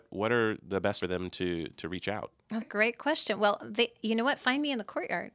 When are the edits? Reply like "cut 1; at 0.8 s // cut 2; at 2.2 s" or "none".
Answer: cut 1; at 1.0 s // cut 2; at 2.6 s